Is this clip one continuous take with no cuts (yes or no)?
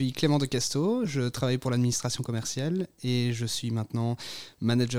yes